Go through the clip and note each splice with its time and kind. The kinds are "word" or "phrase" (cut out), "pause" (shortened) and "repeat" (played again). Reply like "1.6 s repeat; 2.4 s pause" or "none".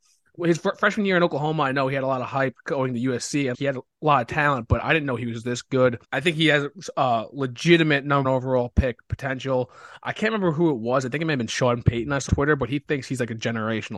3.5 s word; 6.0 s pause; 8.2 s word; 12.3 s word